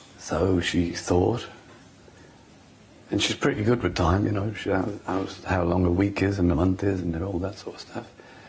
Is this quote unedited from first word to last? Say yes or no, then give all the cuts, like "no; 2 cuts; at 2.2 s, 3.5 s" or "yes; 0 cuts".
yes; 0 cuts